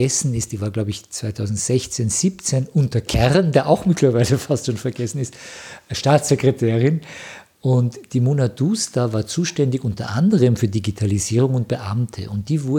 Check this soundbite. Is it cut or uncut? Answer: uncut